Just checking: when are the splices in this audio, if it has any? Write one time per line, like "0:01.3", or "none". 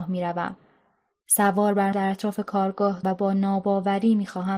0:01.9
0:03.0